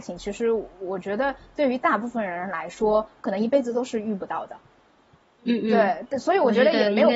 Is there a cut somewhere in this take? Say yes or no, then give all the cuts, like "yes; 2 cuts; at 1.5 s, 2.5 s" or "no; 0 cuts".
no; 0 cuts